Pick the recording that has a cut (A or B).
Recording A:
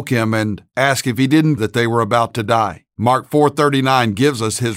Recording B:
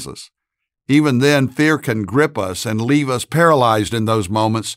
A